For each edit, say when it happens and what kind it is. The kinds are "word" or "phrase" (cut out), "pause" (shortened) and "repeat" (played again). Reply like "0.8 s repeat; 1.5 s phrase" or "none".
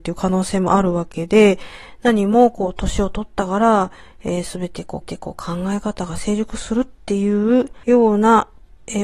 5.0 s repeat; 7.8 s pause